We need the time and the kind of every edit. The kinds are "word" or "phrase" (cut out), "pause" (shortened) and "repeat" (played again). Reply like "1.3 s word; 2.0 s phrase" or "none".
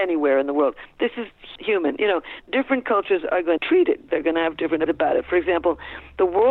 1.6 s word; 2.4 s word; 3.6 s word; 4.1 s word; 4.9 s word